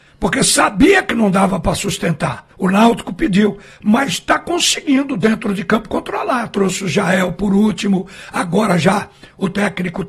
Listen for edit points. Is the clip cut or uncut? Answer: cut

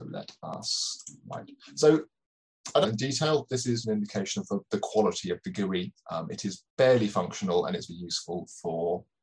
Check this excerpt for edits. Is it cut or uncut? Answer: cut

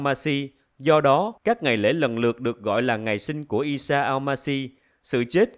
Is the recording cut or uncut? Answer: cut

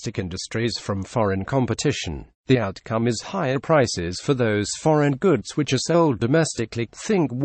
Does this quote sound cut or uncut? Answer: cut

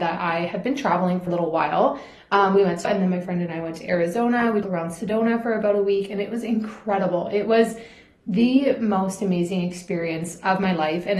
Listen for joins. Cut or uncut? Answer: cut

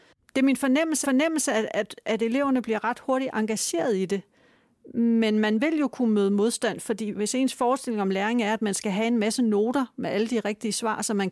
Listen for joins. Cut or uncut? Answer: cut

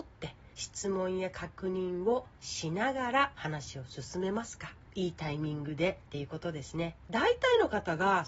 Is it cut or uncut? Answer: cut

